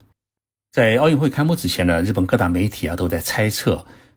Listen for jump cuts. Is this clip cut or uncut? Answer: uncut